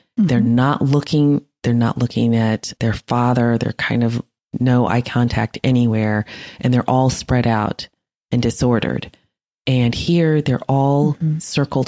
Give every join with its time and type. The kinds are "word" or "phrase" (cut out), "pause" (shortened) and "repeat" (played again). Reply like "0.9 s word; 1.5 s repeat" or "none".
2.8 s word

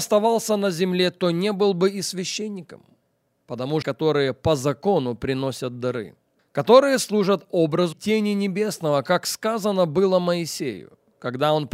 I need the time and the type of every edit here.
3.8 s phrase; 6.4 s pause; 7.9 s word

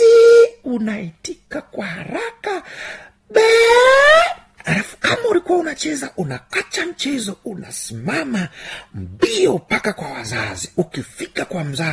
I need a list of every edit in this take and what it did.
4.6 s pause

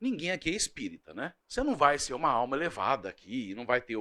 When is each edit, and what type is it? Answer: 1.4 s pause

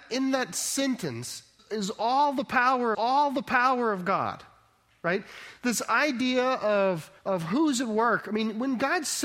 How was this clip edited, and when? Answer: 1.6 s word; 2.9 s repeat; 7.2 s pause

